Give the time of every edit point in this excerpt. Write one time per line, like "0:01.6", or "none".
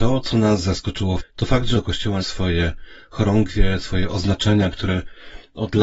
0:01.2
0:01.7
0:02.2